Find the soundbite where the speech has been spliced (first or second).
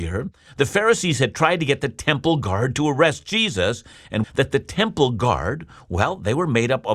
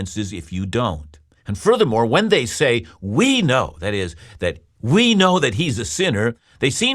first